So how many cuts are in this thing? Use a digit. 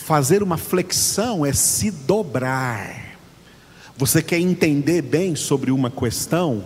0